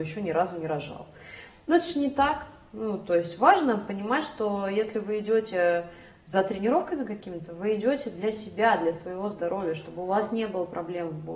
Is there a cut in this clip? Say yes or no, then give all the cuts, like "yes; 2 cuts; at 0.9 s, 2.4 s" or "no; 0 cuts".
no; 0 cuts